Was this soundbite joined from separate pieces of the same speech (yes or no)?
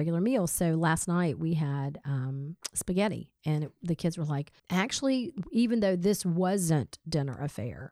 yes